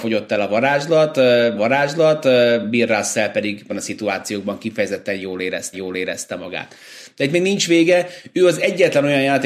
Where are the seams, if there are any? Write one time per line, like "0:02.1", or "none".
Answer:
0:01.6
0:03.7
0:05.7